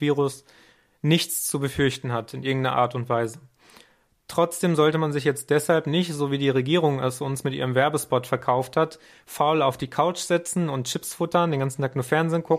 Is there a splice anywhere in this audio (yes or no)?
no